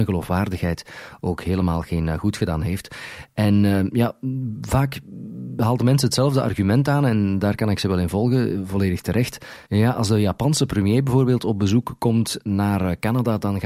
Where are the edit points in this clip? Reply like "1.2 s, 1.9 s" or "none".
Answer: 9.7 s